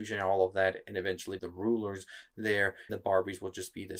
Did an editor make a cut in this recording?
yes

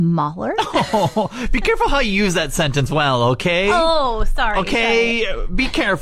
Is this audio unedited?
no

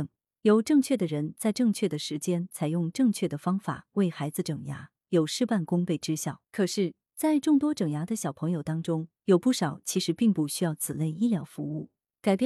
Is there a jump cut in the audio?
yes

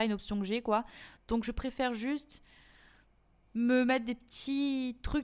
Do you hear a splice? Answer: no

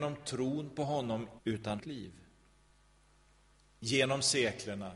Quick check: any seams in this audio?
yes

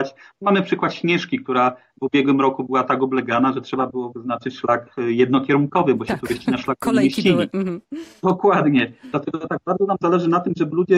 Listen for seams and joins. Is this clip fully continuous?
yes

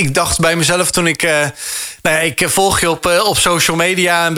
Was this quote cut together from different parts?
no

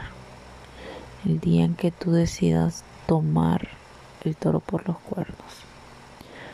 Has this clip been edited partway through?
no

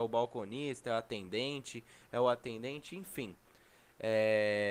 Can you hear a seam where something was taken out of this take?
no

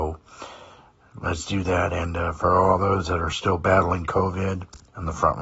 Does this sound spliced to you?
no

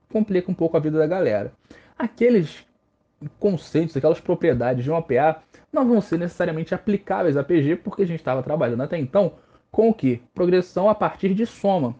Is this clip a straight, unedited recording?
yes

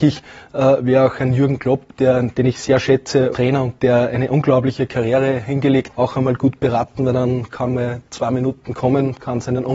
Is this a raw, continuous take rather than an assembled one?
no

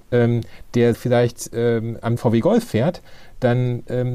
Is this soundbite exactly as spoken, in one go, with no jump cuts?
no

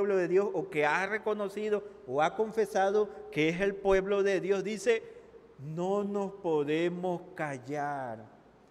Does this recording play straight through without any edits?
yes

